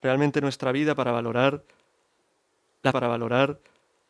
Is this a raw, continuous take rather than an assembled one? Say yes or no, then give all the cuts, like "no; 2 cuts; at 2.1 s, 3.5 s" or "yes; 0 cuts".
no; 1 cut; at 2.9 s